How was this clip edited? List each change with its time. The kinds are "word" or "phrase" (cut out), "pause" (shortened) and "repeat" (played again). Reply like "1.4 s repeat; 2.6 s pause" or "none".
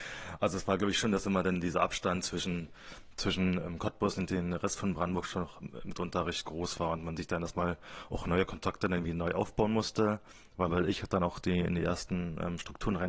none